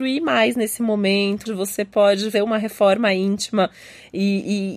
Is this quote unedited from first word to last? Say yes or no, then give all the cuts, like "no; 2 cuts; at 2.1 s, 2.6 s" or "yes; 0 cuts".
no; 2 cuts; at 1.5 s, 2.3 s